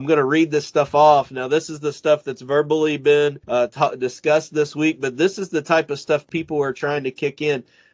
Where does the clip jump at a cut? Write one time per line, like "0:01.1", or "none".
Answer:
0:03.4